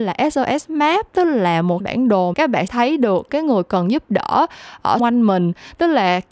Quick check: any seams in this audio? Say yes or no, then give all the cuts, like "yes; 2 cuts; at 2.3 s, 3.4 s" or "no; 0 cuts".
yes; 5 cuts; at 1.8 s, 2.3 s, 2.7 s, 3.3 s, 5.0 s